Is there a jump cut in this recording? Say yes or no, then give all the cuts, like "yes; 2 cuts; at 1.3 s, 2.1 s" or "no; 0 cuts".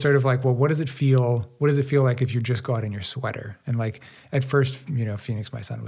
no; 0 cuts